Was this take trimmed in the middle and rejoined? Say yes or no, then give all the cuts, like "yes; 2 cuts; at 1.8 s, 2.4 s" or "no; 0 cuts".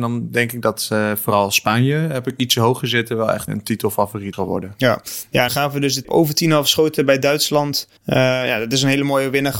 yes; 5 cuts; at 3.5 s, 4.3 s, 5.5 s, 6.0 s, 8.0 s